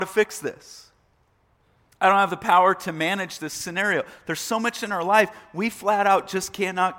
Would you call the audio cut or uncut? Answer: uncut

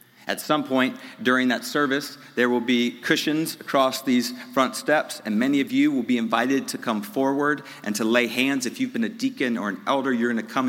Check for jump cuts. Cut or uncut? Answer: uncut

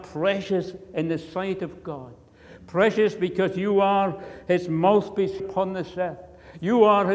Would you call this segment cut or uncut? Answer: cut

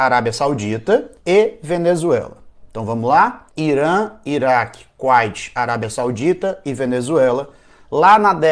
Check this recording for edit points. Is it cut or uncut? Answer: cut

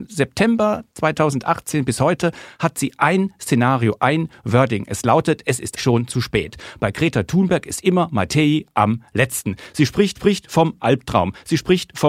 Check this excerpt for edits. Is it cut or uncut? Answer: cut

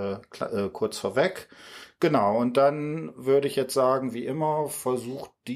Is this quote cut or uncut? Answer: uncut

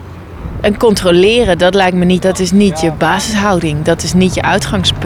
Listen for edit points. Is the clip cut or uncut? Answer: cut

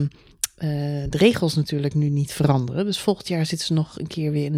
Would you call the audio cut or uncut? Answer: uncut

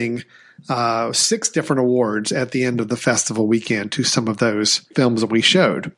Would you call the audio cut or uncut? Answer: cut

